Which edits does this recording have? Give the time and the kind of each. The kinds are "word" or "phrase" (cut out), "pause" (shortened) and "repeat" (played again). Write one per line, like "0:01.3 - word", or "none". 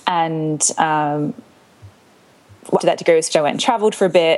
0:02.8 - word
0:03.3 - word